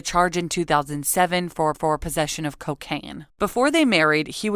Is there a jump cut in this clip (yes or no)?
yes